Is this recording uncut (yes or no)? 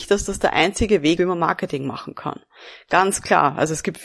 no